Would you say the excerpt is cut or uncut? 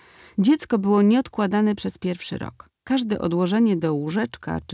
cut